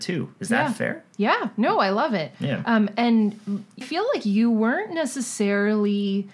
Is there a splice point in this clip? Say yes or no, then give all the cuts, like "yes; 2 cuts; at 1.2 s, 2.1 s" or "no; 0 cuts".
yes; 1 cut; at 3.8 s